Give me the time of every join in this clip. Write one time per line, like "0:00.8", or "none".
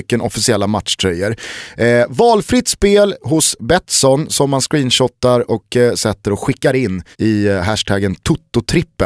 0:07.1

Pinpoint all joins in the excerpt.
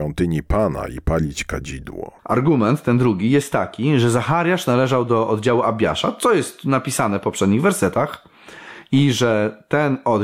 0:02.2

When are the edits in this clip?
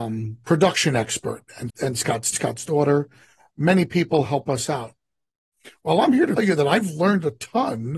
0:01.7
0:02.3
0:06.4

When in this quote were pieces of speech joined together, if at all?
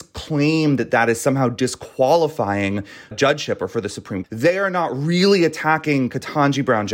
0:03.1
0:04.2

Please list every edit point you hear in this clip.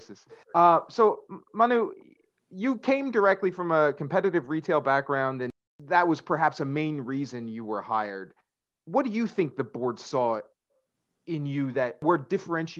none

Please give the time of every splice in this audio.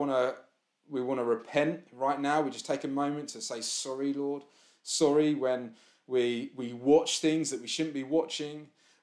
none

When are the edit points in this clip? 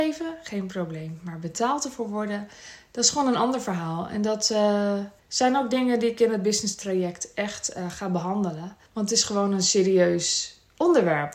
0:05.2
0:08.9

